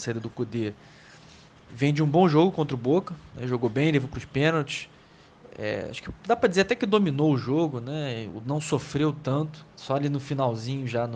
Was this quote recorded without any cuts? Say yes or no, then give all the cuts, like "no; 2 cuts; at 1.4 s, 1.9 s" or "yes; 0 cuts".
no; 1 cut; at 9.7 s